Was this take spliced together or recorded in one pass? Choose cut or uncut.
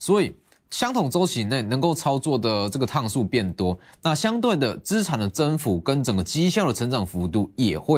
uncut